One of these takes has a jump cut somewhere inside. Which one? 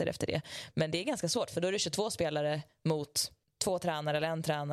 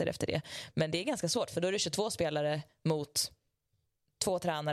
first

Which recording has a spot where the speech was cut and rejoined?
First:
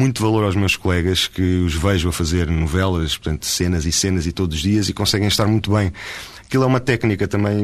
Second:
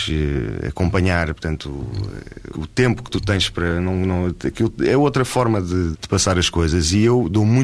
second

